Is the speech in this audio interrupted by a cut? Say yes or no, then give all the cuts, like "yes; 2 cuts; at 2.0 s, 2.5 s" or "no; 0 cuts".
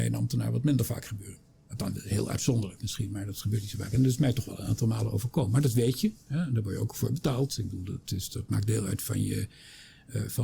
no; 0 cuts